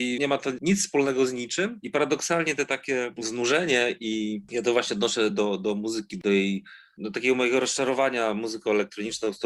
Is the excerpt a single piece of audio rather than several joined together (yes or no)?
yes